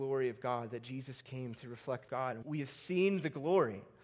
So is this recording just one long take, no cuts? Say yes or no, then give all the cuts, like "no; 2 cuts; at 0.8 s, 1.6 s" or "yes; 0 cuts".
no; 2 cuts; at 2.1 s, 2.4 s